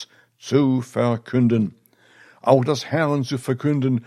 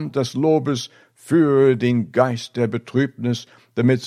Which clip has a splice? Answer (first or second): first